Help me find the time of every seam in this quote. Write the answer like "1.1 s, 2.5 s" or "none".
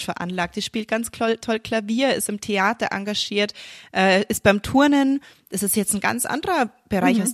none